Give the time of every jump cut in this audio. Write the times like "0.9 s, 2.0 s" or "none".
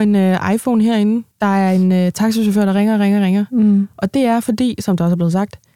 1.3 s